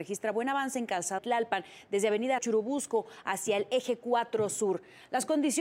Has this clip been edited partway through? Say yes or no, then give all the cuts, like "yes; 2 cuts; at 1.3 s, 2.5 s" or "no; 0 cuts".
yes; 2 cuts; at 1.2 s, 2.4 s